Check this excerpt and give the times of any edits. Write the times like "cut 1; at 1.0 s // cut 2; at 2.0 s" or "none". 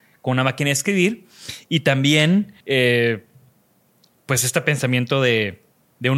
cut 1; at 2.6 s